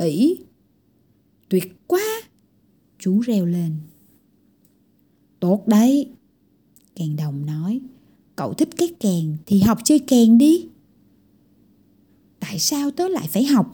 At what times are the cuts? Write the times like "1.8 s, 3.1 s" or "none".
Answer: none